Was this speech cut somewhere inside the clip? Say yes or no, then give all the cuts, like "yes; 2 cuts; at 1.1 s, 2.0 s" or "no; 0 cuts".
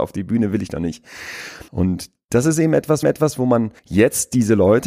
yes; 3 cuts; at 1.7 s, 3.0 s, 3.8 s